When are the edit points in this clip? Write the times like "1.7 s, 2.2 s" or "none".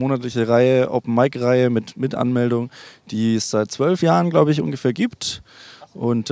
none